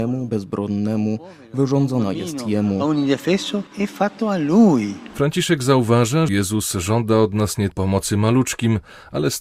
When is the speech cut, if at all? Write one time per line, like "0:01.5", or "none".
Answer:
0:06.3
0:07.7